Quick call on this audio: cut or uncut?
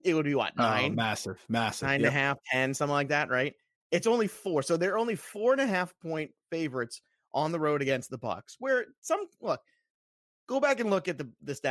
uncut